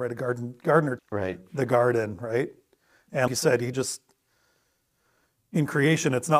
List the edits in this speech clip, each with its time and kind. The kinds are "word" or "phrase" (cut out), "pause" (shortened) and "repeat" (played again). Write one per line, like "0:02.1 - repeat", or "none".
0:01.0 - word
0:03.3 - word
0:03.7 - word